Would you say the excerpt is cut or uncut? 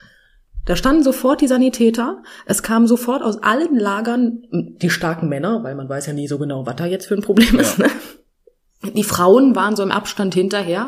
uncut